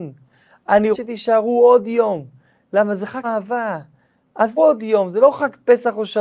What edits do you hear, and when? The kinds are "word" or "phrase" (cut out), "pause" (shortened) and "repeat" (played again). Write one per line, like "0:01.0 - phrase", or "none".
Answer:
0:00.9 - word
0:03.2 - word
0:04.6 - word